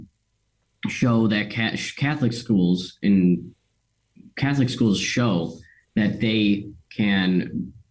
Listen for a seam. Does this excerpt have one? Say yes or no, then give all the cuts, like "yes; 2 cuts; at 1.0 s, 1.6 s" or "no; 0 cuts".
no; 0 cuts